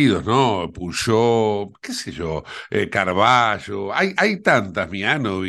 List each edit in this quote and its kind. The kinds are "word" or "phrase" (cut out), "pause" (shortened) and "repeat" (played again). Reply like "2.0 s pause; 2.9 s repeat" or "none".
none